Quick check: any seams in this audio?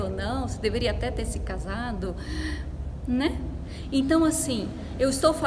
no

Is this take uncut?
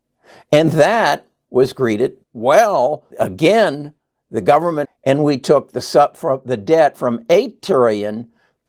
no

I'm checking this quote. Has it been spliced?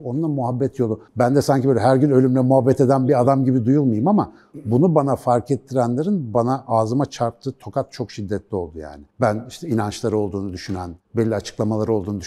yes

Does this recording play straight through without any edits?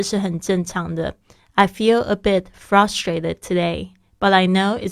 yes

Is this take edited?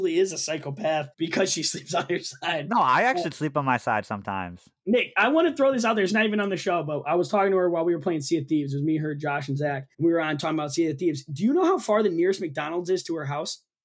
yes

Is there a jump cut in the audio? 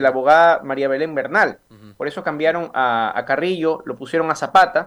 yes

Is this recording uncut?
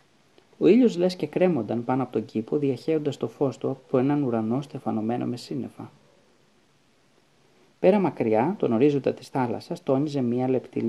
yes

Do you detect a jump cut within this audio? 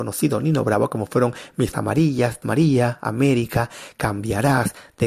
yes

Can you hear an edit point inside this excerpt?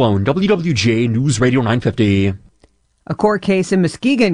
no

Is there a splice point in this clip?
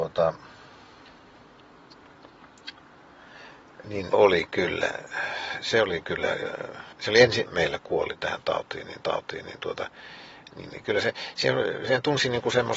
yes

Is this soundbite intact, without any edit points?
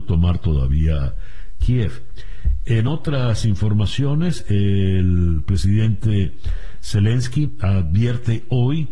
yes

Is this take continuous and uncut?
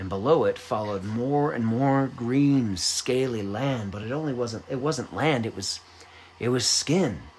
yes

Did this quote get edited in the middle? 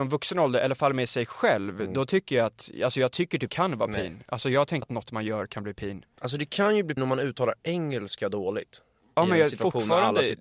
yes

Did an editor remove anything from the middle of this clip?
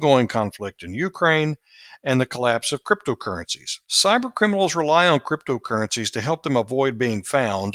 yes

